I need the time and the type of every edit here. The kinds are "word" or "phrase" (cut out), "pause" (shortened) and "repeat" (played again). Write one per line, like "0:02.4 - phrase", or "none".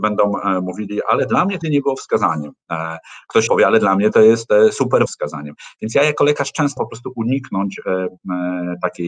0:01.6 - word
0:03.5 - word
0:05.1 - word
0:06.8 - word